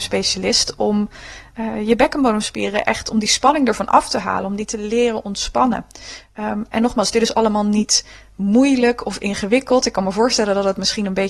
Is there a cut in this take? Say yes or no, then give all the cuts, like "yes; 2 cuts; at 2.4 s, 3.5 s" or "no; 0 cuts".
no; 0 cuts